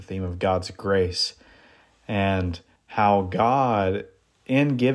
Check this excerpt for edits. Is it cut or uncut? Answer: cut